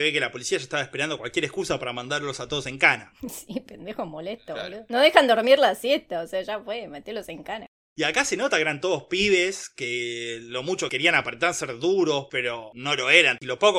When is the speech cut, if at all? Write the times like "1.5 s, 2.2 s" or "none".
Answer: none